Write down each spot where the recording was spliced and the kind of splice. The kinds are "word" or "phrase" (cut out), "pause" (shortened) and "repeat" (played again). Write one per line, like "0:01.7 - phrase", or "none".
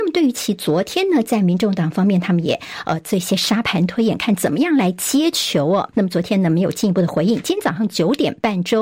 0:05.9 - pause